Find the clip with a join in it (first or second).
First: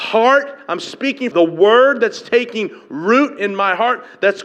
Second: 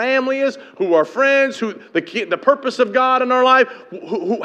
first